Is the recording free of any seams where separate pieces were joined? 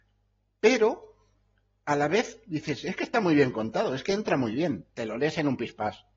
yes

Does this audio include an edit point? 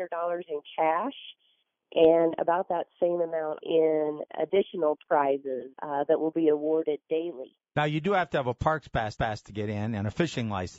yes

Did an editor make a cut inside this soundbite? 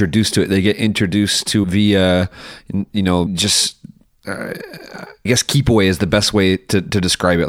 yes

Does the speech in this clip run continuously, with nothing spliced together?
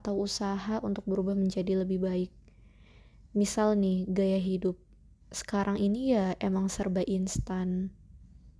yes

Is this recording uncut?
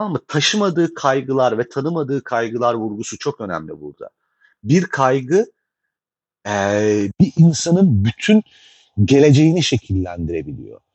yes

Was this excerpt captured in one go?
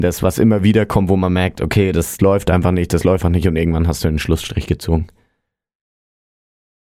no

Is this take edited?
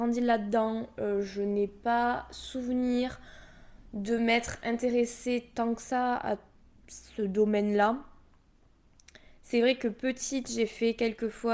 no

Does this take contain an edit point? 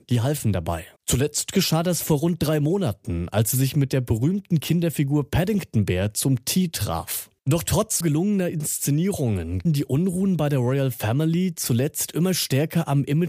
yes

